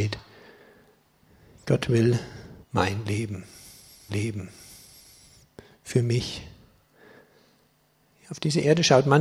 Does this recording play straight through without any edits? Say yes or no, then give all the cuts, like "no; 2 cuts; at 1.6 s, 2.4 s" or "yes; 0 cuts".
no; 2 cuts; at 2.6 s, 4.1 s